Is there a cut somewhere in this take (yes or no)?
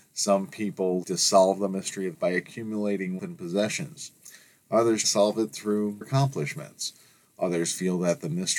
yes